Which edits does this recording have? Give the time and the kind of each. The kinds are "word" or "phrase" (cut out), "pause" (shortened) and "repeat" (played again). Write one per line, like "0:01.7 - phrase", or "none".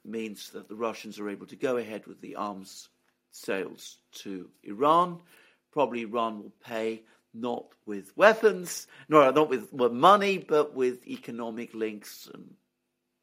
none